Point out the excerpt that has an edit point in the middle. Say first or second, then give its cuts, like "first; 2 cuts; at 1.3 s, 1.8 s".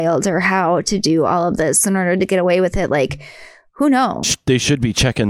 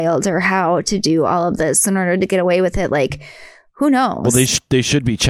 first; 1 cut; at 4.2 s